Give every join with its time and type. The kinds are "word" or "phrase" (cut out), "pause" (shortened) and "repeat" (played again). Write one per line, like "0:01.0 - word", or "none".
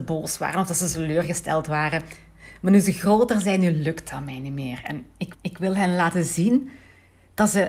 0:05.3 - repeat